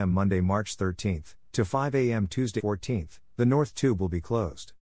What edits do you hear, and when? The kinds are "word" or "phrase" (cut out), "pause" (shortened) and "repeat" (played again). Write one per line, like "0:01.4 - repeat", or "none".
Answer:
0:02.6 - word